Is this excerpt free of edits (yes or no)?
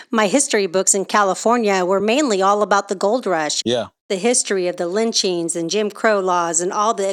yes